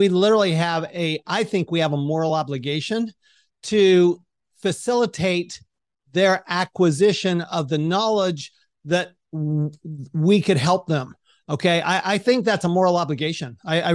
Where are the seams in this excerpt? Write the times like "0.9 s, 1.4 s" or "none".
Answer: none